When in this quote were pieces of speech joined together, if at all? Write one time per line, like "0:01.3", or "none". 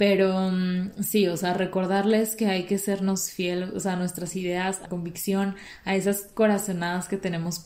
0:04.9